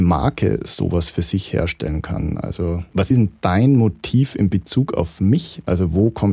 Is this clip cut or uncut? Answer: uncut